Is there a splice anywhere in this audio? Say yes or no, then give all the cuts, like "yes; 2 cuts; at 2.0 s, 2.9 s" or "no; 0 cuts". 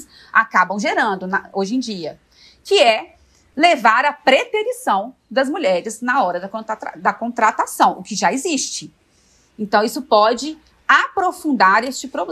no; 0 cuts